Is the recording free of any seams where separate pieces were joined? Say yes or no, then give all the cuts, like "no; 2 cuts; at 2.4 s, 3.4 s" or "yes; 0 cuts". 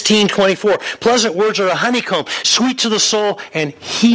yes; 0 cuts